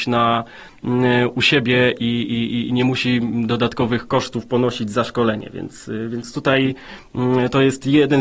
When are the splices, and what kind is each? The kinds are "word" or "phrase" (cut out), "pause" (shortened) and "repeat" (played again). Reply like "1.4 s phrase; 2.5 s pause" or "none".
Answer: none